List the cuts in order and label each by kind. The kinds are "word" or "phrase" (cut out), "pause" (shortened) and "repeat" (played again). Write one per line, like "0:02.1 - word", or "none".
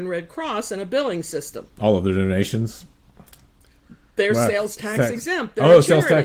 0:01.7 - pause